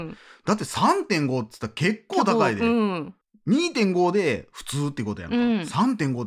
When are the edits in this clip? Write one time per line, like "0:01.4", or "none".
0:03.2